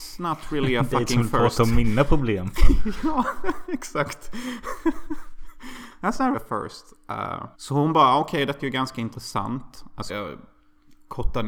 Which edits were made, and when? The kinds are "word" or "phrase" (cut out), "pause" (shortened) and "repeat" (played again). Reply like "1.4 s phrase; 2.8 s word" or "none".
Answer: 6.3 s word; 7.5 s pause; 8.6 s word; 10.1 s word